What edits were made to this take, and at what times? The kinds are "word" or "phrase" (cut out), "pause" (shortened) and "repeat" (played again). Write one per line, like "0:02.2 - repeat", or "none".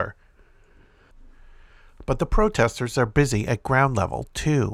none

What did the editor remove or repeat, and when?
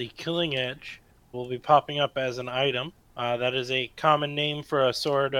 0:01.3 - word
0:03.0 - pause

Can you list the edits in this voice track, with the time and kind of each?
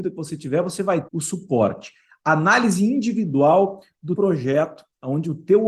0:01.1 - word
0:04.2 - word

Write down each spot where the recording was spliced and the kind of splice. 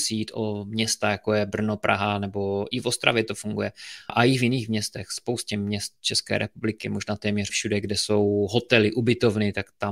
0:04.1 - word
0:07.5 - word

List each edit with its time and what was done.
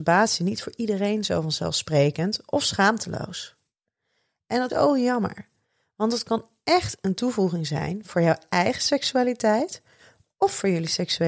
0:04.7 - word

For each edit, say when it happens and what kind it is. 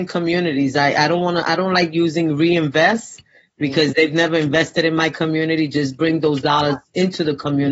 none

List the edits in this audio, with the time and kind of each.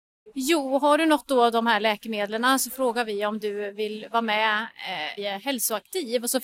0:05.2 - word

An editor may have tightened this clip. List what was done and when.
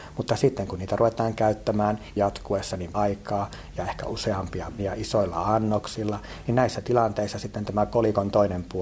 0:02.2 - word
0:02.9 - word
0:04.8 - word

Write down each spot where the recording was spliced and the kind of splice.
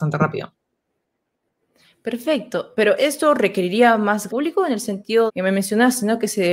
0:03.0 - word
0:04.3 - word
0:05.3 - word

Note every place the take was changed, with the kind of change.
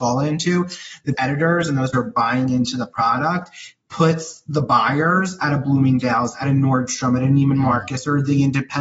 0:01.1 - word
0:01.9 - word

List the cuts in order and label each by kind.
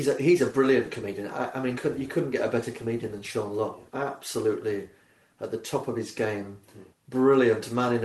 0:01.7 - word
0:03.9 - pause
0:06.9 - pause

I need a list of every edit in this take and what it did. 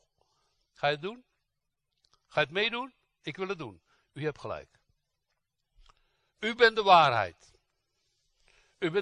none

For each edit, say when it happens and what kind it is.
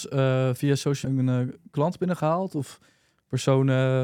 0:01.0 - word

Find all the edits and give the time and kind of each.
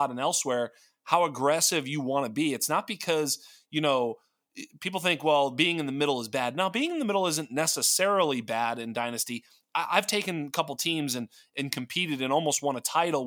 none

